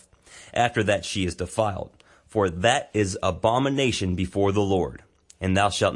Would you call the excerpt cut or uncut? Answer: uncut